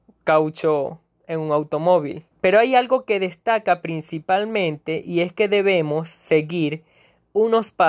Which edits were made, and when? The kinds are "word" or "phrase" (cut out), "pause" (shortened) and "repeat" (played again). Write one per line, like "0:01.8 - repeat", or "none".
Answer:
0:02.3 - pause